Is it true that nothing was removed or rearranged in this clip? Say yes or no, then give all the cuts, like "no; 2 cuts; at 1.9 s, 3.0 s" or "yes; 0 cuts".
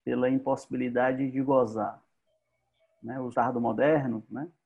no; 1 cut; at 3.3 s